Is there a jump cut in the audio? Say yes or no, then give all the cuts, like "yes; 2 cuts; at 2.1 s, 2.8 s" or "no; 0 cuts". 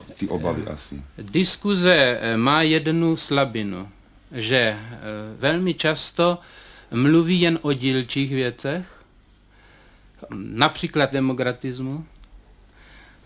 yes; 3 cuts; at 5.4 s, 10.3 s, 11.1 s